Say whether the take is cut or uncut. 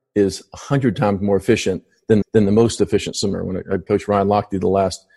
cut